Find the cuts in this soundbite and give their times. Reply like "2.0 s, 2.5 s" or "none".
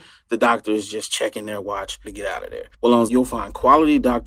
2.0 s, 2.7 s, 3.1 s